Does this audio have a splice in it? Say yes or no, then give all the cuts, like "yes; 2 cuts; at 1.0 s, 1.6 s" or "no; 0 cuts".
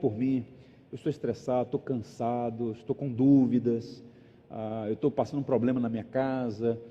no; 0 cuts